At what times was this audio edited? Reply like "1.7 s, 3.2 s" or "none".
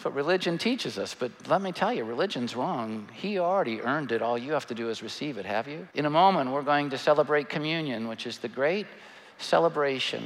5.9 s